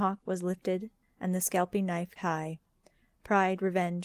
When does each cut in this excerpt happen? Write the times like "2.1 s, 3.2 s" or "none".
2.2 s